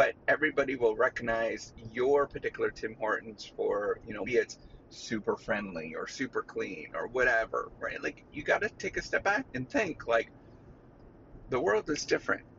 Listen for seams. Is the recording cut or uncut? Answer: cut